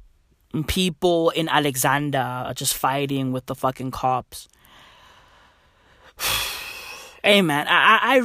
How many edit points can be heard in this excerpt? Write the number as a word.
zero